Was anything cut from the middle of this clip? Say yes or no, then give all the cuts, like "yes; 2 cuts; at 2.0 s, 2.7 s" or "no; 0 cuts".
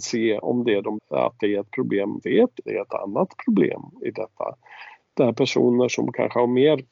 yes; 3 cuts; at 1.0 s, 2.2 s, 2.7 s